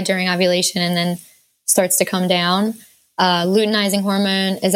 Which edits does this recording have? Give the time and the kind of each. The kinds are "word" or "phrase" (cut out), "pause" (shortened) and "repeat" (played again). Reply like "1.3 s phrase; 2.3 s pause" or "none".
none